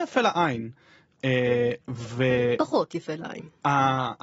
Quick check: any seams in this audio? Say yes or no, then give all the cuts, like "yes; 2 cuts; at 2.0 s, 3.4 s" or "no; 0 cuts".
no; 0 cuts